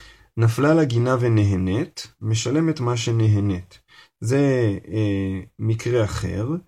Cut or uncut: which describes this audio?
uncut